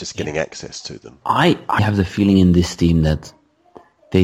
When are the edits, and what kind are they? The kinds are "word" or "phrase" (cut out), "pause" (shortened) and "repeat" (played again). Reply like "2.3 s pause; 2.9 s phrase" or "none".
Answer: 1.2 s word; 1.8 s word